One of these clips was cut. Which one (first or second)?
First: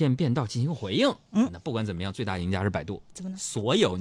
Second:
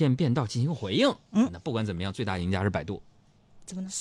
first